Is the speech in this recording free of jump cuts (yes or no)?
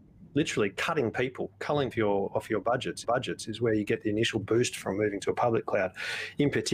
no